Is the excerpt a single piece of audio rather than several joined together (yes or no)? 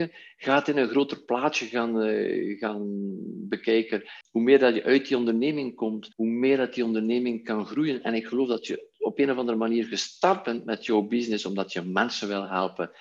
no